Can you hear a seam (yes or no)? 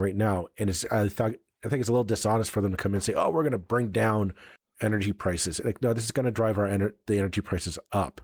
no